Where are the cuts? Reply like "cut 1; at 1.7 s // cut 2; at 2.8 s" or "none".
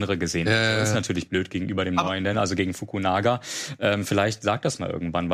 none